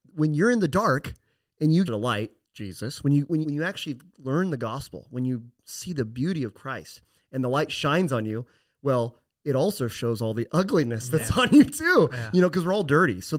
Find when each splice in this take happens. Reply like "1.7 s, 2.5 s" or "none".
1.9 s, 3.4 s